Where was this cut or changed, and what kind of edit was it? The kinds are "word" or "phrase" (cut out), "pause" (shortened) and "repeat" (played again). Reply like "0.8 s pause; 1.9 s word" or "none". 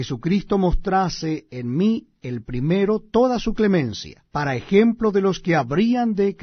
4.3 s pause